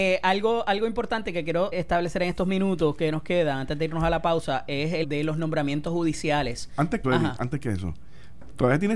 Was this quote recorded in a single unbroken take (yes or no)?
no